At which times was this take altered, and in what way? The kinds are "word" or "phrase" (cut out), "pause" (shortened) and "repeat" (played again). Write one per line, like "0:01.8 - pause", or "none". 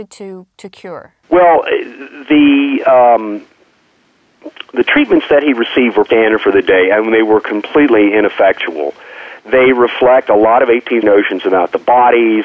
0:01.2 - pause
0:06.1 - word
0:11.0 - word

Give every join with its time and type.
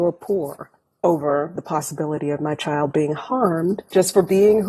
none

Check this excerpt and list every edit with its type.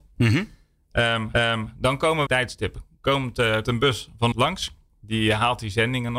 0:01.3 - repeat
0:02.3 - phrase
0:03.6 - word
0:04.3 - word

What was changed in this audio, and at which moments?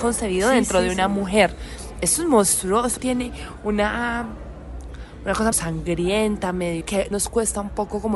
0:03.0 - word
0:05.5 - word
0:06.8 - word
0:07.1 - word

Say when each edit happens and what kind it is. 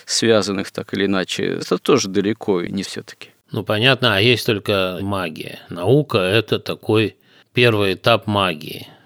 0:01.6 - phrase
0:02.8 - word
0:03.4 - pause
0:05.0 - word
0:05.6 - pause

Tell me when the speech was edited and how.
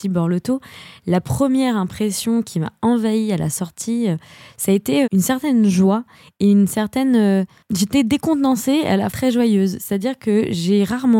0:05.0 - word
0:09.1 - word

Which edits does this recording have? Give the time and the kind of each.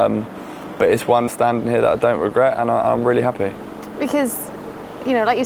0:01.3 - word

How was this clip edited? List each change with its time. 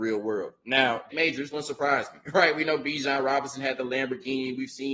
0:01.1 - word
0:01.5 - word

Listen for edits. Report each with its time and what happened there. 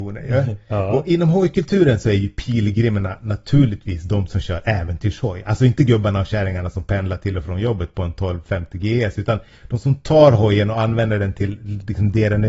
none

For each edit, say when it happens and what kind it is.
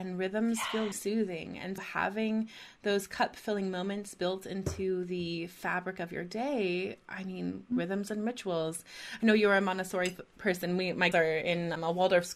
0:00.9 - word
0:01.8 - word
0:11.1 - word

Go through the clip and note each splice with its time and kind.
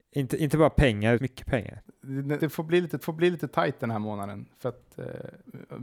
0:01.2 - phrase
0:02.4 - word
0:03.0 - repeat

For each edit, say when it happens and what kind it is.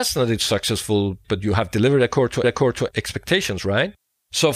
0:01.2 - word
0:02.4 - repeat

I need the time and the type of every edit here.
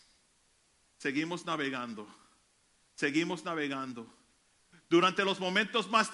none

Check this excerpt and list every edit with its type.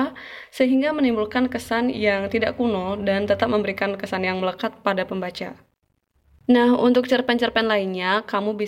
none

